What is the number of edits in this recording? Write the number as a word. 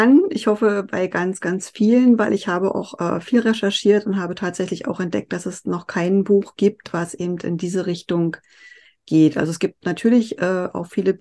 zero